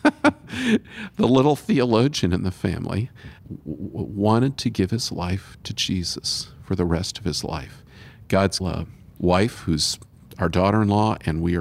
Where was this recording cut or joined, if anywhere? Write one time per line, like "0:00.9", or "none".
0:03.4
0:08.6

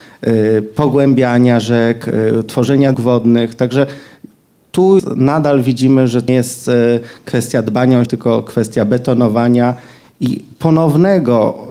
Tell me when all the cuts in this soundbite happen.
0:02.9
0:05.0
0:06.3
0:08.1

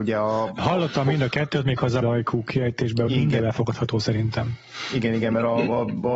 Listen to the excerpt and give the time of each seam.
0:02.0
0:03.1
0:03.4

